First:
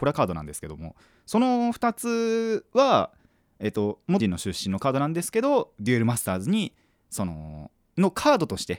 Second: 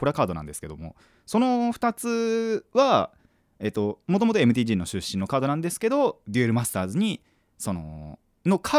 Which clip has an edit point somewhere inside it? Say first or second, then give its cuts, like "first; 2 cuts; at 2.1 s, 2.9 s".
first; 1 cut; at 4.2 s